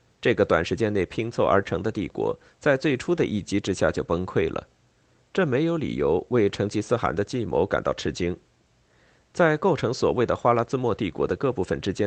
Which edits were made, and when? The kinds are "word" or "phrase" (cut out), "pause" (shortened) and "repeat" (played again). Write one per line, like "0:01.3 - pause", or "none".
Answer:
none